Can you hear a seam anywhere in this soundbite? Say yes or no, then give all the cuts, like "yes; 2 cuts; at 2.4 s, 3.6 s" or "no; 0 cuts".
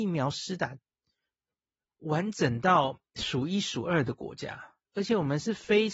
yes; 1 cut; at 4.8 s